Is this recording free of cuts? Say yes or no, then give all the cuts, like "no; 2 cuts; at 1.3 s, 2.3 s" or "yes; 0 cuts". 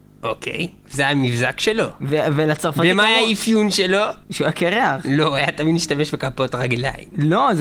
no; 1 cut; at 4.2 s